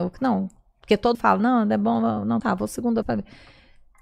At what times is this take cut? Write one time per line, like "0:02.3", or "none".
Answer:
0:01.1
0:02.4
0:03.0